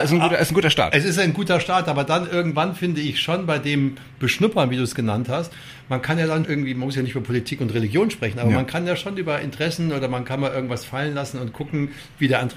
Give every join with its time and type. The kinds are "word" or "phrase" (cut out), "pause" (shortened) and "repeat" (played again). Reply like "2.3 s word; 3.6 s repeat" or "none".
6.4 s word